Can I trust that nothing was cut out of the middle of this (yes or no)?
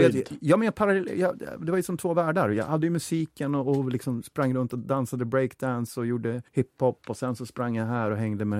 no